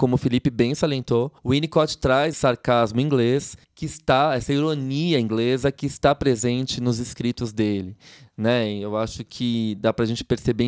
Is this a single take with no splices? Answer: no; 3 cuts; at 1.4 s, 2.3 s, 3.6 s

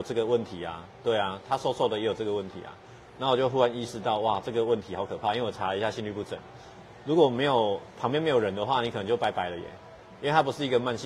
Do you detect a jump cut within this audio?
no; 0 cuts

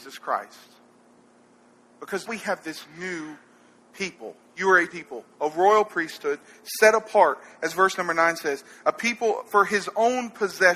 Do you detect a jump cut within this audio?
yes; 3 cuts; at 2.3 s, 4.9 s, 5.3 s

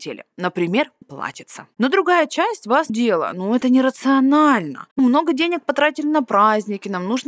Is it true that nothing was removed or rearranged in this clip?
no; 3 cuts; at 1.0 s, 2.9 s, 5.0 s

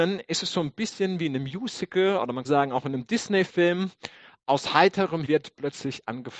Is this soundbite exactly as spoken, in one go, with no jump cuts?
no; 2 cuts; at 2.4 s, 5.2 s

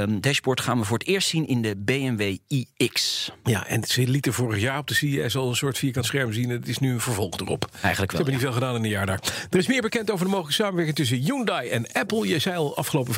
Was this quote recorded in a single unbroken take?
yes; 0 cuts

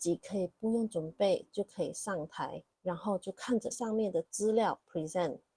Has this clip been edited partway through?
yes; 2 cuts; at 2.7 s, 3.7 s

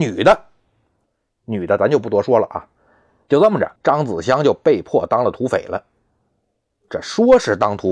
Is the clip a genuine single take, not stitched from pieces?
no; 1 cut; at 3.8 s

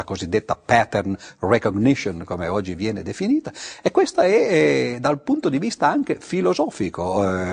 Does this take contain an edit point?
no; 0 cuts

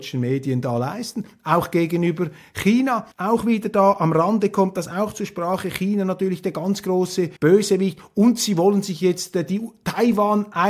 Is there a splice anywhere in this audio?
yes; 2 cuts; at 3.1 s, 7.4 s

